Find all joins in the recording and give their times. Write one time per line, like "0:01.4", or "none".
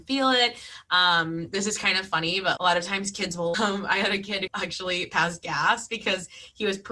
0:02.6
0:03.5
0:04.5